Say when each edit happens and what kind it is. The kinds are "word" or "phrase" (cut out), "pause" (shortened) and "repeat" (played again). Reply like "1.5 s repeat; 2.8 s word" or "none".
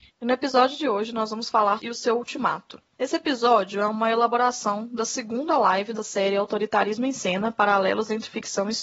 1.8 s phrase; 6.0 s word